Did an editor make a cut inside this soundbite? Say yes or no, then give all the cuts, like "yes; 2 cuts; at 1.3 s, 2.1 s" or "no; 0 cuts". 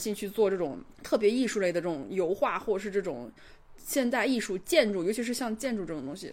yes; 1 cut; at 0.9 s